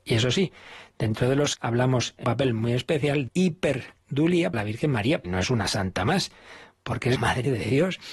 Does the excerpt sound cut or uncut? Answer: cut